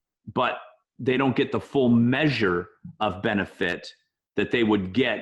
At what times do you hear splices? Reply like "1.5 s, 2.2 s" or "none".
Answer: none